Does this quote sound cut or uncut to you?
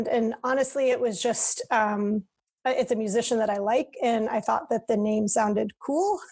uncut